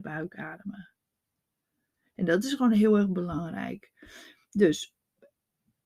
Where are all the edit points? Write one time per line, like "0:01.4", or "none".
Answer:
none